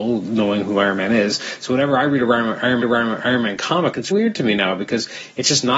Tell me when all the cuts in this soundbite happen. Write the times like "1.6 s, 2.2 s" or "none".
2.8 s, 4.1 s